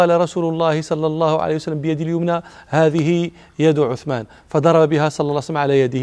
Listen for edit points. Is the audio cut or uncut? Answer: uncut